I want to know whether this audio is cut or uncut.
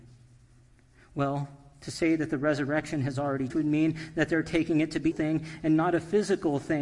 cut